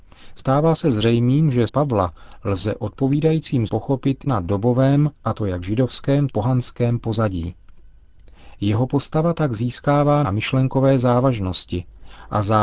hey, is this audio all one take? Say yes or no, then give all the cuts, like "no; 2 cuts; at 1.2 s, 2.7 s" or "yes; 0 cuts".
no; 6 cuts; at 1.7 s, 3.7 s, 4.3 s, 5.1 s, 6.3 s, 10.2 s